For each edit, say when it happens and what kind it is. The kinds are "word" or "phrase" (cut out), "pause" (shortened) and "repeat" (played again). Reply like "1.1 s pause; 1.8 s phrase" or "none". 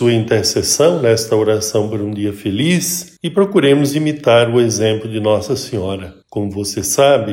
3.2 s pause; 6.2 s pause

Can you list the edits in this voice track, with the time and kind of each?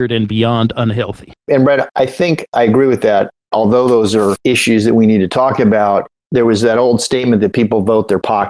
1.4 s pause

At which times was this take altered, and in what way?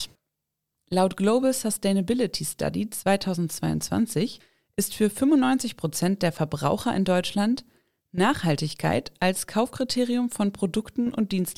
none

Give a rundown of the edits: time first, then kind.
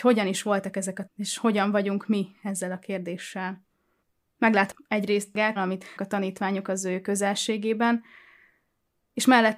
1.1 s word; 4.0 s pause; 5.6 s phrase; 6.0 s phrase

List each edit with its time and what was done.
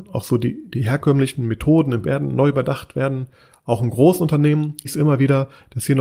2.0 s word; 4.8 s word

